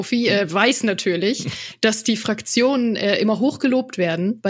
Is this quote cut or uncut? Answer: uncut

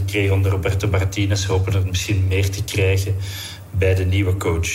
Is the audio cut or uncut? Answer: uncut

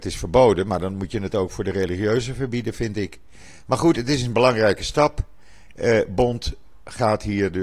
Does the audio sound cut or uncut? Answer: uncut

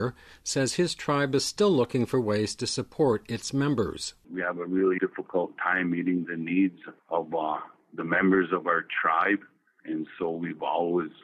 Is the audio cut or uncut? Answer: cut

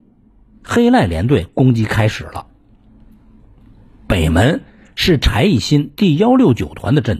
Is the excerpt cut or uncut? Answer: uncut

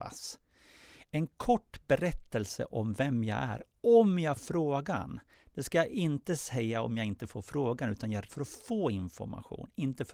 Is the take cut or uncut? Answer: cut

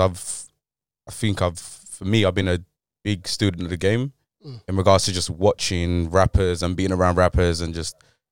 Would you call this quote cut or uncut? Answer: uncut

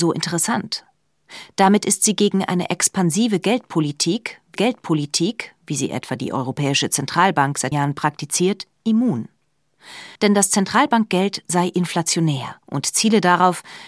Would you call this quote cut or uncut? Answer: cut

